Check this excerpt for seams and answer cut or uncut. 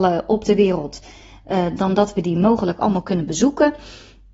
uncut